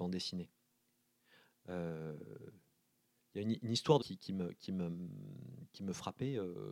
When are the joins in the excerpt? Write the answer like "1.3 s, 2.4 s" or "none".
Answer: 3.3 s, 4.0 s